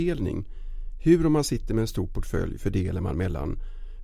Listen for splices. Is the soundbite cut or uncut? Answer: uncut